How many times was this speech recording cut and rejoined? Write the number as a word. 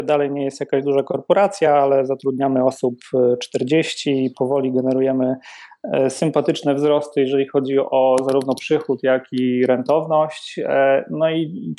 zero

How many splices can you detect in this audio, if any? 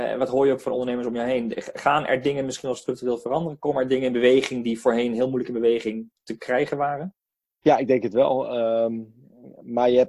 one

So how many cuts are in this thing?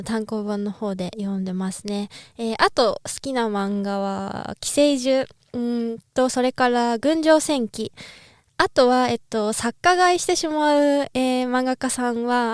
zero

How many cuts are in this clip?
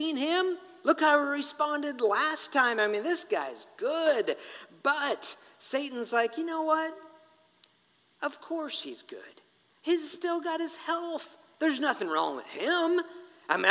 zero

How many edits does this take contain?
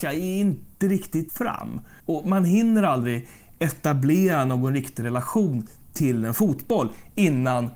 two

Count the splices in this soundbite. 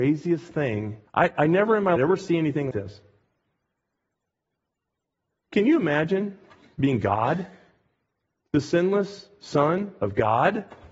three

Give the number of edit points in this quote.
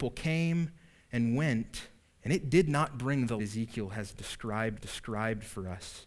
three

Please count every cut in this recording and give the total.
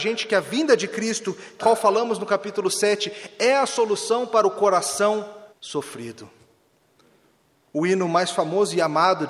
two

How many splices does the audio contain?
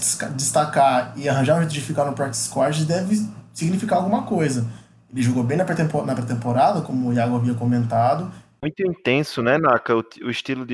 zero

